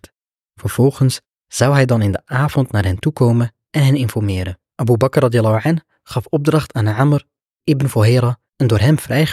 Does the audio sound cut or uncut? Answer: uncut